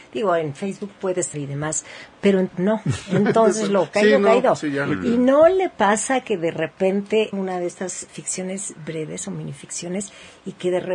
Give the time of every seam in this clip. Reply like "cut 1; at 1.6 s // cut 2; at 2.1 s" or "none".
cut 1; at 1.3 s // cut 2; at 2.5 s // cut 3; at 7.3 s // cut 4; at 8.1 s